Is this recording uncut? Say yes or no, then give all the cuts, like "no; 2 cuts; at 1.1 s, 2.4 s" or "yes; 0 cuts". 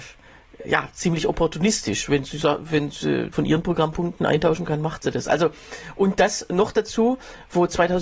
no; 1 cut; at 3.3 s